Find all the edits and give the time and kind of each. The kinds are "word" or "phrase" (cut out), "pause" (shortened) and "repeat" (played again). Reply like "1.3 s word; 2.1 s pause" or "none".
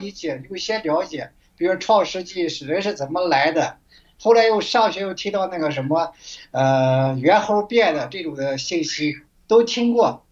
none